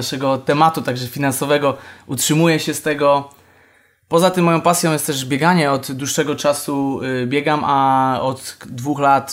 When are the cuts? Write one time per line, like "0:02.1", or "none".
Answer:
none